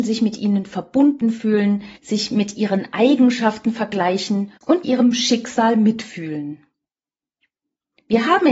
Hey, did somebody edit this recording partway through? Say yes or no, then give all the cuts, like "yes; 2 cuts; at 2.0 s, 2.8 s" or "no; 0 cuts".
yes; 2 cuts; at 2.0 s, 4.8 s